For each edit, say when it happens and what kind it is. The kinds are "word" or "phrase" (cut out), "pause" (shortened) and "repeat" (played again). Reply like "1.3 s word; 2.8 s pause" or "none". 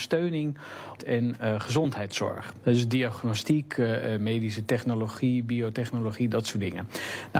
1.0 s phrase